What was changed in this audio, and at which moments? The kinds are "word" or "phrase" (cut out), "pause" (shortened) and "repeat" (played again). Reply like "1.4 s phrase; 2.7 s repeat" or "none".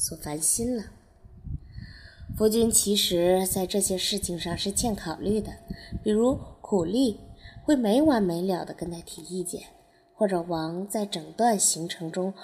none